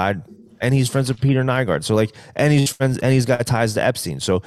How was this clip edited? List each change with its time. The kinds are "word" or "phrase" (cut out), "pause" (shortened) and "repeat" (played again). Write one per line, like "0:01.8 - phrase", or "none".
none